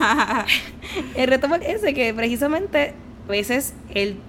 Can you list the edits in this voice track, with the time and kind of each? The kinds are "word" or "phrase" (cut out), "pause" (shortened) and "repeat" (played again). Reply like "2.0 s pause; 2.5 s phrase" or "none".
1.6 s word; 3.3 s word